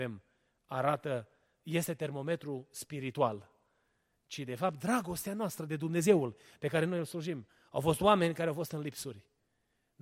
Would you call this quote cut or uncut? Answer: uncut